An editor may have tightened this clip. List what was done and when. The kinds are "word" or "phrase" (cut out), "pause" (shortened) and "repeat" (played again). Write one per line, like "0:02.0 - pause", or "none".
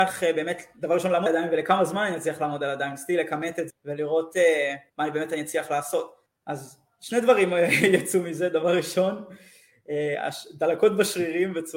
0:01.3 - word
0:03.7 - word
0:04.9 - pause
0:06.3 - pause